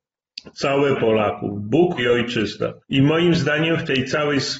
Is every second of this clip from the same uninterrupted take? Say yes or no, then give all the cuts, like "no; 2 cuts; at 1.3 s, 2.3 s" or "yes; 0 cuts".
no; 3 cuts; at 1.0 s, 2.0 s, 2.8 s